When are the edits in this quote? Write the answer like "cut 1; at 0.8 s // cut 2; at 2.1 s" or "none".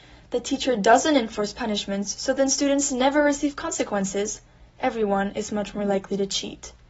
none